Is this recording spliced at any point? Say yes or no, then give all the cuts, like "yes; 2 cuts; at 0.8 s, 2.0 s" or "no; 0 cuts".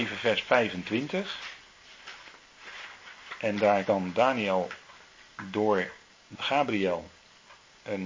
yes; 2 cuts; at 3.8 s, 6.3 s